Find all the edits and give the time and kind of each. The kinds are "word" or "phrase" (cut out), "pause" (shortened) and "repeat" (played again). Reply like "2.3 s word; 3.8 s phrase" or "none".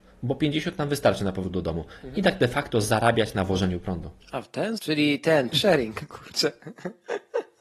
4.8 s word; 5.5 s word